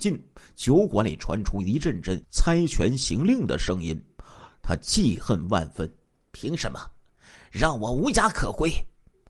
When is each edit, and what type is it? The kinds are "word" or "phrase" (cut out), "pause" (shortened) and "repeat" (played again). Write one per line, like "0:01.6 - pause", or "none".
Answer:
0:02.2 - pause
0:06.1 - pause